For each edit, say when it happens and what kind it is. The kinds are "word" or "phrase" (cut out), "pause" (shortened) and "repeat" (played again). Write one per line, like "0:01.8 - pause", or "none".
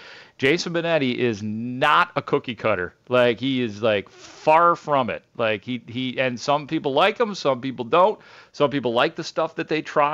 none